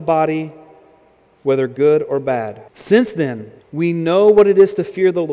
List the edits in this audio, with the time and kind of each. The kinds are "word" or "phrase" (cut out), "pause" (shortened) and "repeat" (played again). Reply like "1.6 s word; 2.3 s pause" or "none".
2.7 s pause; 3.6 s pause